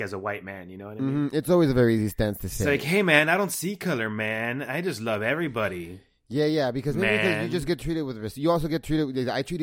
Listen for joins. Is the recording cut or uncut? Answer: uncut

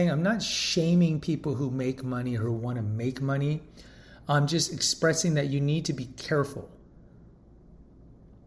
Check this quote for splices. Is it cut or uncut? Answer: uncut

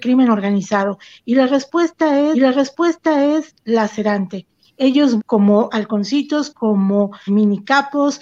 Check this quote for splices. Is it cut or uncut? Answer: cut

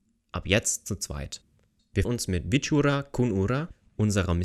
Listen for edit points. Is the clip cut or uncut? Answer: cut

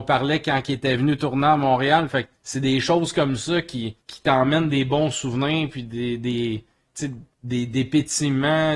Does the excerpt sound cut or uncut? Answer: cut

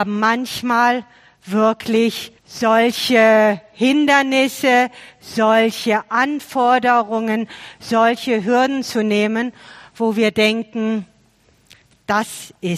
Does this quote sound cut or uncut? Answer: cut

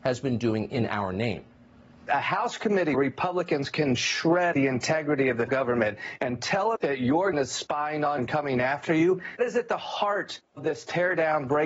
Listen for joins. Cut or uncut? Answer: cut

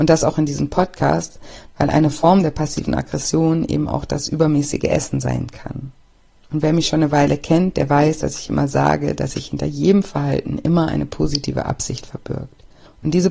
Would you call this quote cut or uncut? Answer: uncut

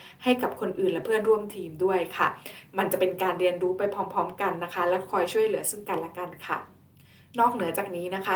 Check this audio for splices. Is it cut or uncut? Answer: cut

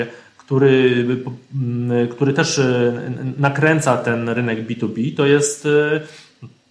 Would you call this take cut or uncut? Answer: uncut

